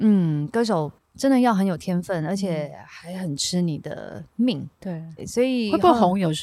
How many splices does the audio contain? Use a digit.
3